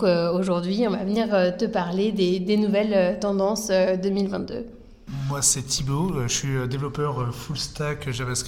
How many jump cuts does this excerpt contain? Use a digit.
0